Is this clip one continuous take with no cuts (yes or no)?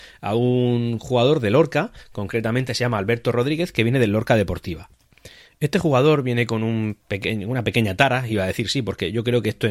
yes